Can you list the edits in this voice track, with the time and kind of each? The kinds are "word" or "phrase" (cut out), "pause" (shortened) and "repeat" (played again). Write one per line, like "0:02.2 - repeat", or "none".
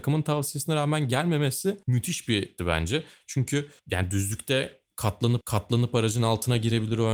0:01.8 - pause
0:02.6 - word
0:03.8 - pause
0:05.4 - repeat